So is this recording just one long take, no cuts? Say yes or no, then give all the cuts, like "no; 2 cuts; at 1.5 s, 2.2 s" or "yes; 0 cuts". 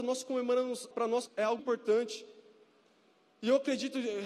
no; 3 cuts; at 0.9 s, 1.3 s, 1.6 s